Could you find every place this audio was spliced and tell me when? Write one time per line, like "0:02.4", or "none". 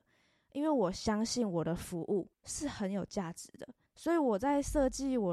0:02.3
0:03.9